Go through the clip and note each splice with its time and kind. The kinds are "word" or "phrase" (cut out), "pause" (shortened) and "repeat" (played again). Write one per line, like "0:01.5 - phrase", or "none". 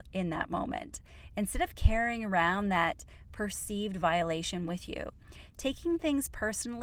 none